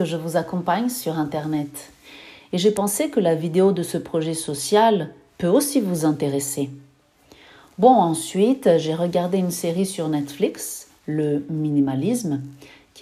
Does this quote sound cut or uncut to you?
uncut